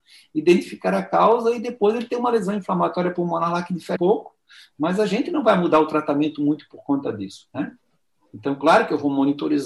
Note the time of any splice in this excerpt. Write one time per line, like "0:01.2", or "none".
0:04.0